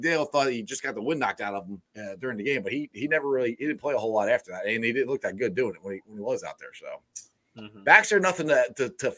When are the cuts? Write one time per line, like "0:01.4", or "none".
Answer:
0:01.9